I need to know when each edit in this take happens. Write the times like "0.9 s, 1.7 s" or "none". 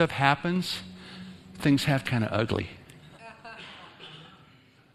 2.0 s